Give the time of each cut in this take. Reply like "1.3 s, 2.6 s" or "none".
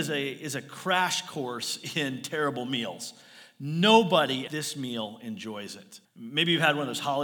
4.5 s, 6.0 s